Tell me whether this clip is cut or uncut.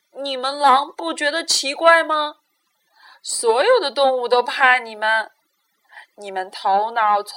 uncut